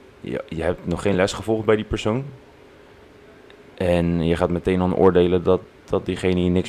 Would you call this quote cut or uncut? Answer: uncut